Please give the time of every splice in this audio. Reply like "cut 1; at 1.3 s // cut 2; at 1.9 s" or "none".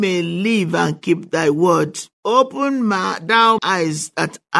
cut 1; at 2.1 s // cut 2; at 3.6 s